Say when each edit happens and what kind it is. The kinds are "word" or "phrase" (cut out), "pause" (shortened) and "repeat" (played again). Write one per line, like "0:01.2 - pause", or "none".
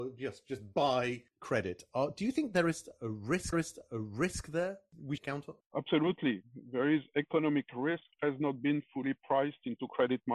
0:03.5 - repeat
0:05.2 - phrase
0:05.6 - pause
0:08.1 - word